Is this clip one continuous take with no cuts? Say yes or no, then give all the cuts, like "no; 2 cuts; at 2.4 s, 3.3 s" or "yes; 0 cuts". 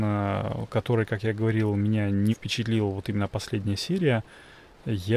no; 1 cut; at 2.3 s